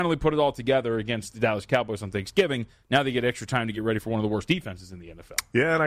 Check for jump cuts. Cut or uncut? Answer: uncut